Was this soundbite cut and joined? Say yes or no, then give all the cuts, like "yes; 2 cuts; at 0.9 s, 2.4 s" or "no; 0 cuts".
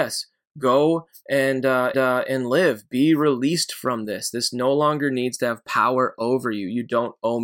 yes; 1 cut; at 1.9 s